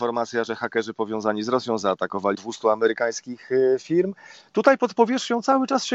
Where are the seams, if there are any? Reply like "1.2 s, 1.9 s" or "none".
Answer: 2.3 s